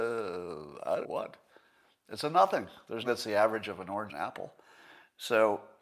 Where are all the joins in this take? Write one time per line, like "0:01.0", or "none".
0:01.0
0:03.0
0:04.1